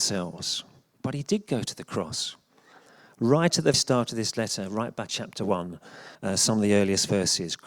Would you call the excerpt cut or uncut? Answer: cut